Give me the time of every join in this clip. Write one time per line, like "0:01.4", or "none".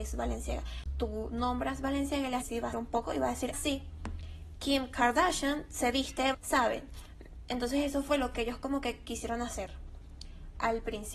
0:02.4
0:02.7
0:03.5
0:06.3